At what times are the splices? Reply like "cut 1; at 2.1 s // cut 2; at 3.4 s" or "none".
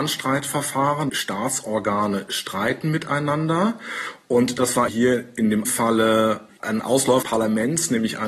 cut 1; at 1.1 s // cut 2; at 4.9 s // cut 3; at 5.6 s // cut 4; at 7.2 s